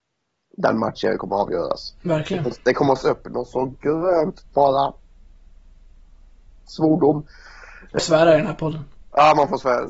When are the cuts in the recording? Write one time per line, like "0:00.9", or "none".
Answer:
0:02.5
0:03.0
0:04.5
0:08.0